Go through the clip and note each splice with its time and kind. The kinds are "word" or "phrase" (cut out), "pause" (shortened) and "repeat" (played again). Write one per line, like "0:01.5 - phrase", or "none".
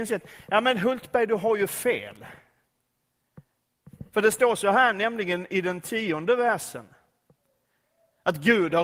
0:04.1 - pause